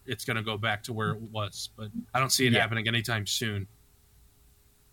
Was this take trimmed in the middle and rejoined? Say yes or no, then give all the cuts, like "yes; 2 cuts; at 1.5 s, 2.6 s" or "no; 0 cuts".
yes; 1 cut; at 2.1 s